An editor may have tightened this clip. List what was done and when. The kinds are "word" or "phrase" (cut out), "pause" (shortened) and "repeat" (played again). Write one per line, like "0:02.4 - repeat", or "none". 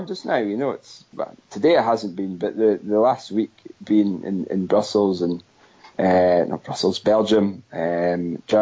none